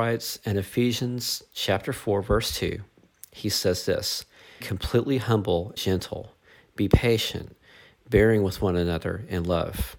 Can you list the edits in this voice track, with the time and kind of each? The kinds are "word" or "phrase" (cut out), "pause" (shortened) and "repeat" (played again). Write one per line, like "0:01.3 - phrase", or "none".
0:04.6 - word
0:05.8 - word